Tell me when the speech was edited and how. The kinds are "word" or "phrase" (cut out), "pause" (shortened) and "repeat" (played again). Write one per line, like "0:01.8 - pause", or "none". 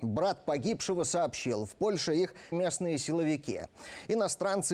0:02.5 - word